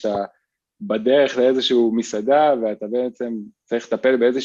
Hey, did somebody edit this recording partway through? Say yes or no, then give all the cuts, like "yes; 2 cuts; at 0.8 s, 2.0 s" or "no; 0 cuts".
no; 0 cuts